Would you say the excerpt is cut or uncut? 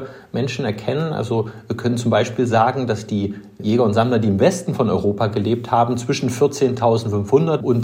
uncut